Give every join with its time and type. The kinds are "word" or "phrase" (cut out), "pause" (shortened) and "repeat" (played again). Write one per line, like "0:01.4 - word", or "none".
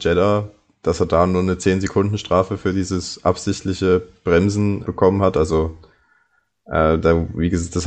0:04.8 - word